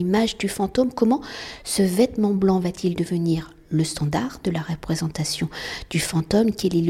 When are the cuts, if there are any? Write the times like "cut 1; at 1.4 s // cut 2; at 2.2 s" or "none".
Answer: none